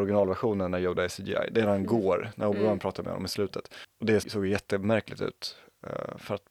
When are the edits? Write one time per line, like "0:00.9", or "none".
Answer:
0:04.2